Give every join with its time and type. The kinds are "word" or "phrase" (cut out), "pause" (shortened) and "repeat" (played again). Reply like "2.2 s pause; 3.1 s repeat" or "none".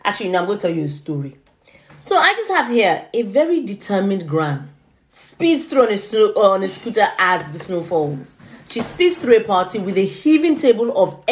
none